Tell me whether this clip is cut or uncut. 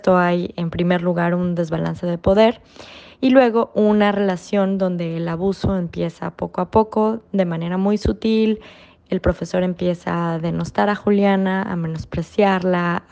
uncut